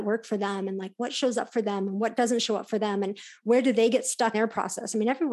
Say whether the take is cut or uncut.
cut